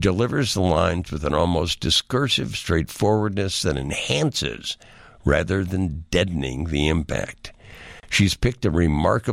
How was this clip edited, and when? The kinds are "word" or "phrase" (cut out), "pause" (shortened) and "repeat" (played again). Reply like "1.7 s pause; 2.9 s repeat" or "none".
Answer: none